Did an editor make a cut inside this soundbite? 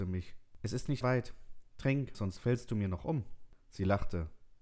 yes; 2 cuts; at 1.0 s, 2.1 s

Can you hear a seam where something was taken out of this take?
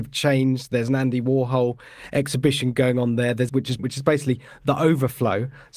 yes; 2 cuts; at 3.5 s, 3.8 s

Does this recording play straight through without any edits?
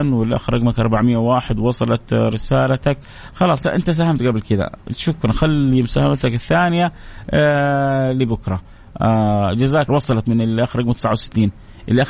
no; 2 cuts; at 3.6 s, 9.9 s

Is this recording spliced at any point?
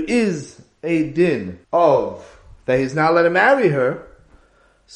yes; 1 cut; at 1.6 s

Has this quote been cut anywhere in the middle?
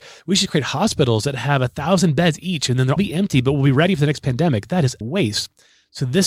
yes; 2 cuts; at 3.0 s, 5.0 s

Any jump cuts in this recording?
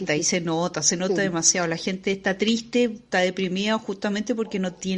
no; 0 cuts

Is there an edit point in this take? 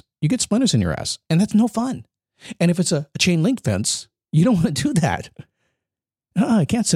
no; 0 cuts

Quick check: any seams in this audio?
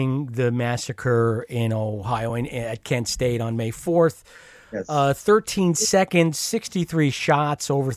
no; 0 cuts

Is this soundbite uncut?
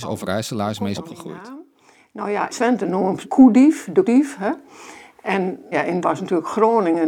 no; 6 cuts; at 0.9 s, 2.5 s, 3.2 s, 4.0 s, 5.7 s, 6.0 s

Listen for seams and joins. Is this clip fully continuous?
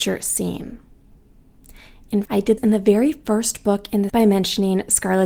no; 3 cuts; at 2.2 s, 2.6 s, 4.1 s

